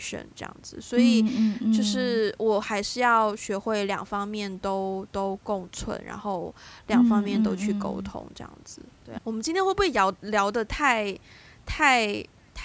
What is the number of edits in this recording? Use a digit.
1